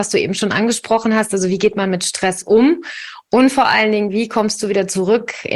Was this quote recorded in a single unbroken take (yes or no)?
yes